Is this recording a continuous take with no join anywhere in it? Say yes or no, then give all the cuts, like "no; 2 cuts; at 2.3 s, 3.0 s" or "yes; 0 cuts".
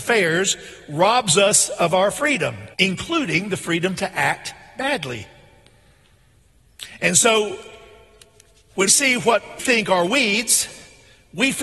no; 3 cuts; at 2.7 s, 8.9 s, 9.6 s